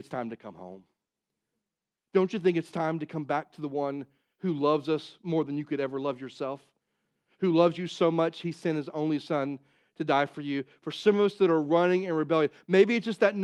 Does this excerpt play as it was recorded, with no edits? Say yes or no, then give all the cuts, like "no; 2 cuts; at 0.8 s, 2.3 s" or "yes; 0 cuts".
yes; 0 cuts